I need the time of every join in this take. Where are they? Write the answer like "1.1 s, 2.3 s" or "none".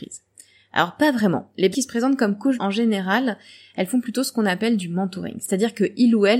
1.7 s, 2.6 s